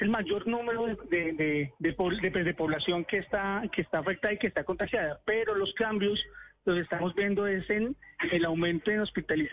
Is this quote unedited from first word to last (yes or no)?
no